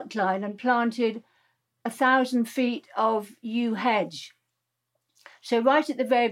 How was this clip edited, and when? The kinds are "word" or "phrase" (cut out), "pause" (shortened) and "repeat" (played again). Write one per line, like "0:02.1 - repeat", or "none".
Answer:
none